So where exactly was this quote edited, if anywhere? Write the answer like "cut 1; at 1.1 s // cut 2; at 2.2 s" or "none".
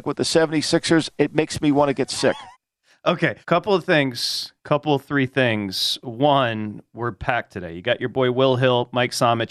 cut 1; at 2.5 s // cut 2; at 3.4 s